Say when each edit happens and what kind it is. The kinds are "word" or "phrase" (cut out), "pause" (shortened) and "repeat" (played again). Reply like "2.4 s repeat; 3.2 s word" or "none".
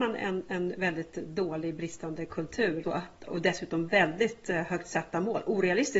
2.8 s word; 3.3 s word